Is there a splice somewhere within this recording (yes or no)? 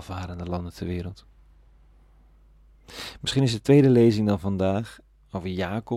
no